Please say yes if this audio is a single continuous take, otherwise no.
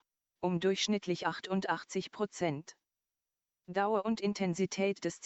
yes